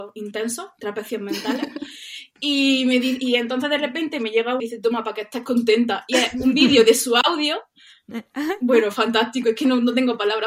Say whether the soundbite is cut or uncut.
cut